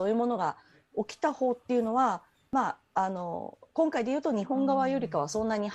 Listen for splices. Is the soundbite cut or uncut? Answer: uncut